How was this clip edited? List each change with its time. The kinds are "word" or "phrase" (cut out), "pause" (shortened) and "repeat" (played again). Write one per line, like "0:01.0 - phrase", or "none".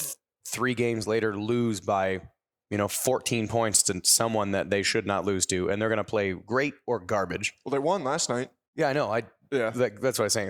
none